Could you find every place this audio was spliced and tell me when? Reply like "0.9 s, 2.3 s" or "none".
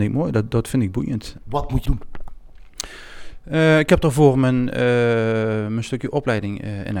1.9 s